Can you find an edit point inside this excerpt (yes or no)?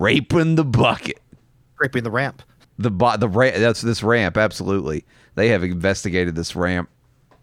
no